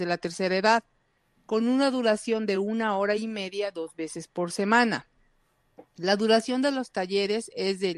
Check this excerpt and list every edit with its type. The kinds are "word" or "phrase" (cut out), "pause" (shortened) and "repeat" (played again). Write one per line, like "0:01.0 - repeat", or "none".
none

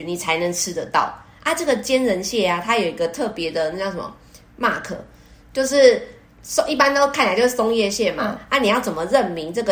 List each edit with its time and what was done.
none

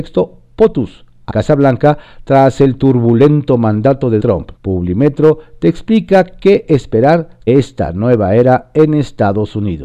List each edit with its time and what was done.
0:01.3 - word
0:04.2 - word
0:04.6 - pause
0:07.5 - word

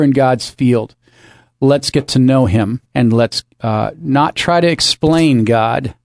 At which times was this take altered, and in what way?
0:02.9 - pause
0:03.5 - pause

